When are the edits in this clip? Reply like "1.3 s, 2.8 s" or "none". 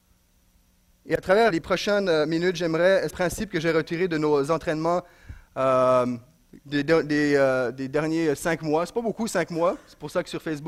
1.5 s, 3.1 s, 6.6 s